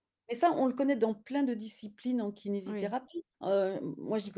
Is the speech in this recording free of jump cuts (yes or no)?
no